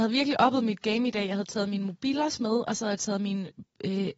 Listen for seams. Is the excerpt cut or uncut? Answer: uncut